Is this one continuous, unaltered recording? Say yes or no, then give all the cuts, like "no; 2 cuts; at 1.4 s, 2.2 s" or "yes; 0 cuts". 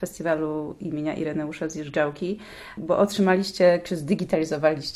yes; 0 cuts